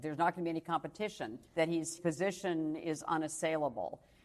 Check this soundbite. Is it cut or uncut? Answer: cut